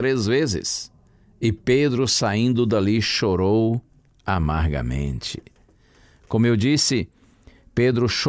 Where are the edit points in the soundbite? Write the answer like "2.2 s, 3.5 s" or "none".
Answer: none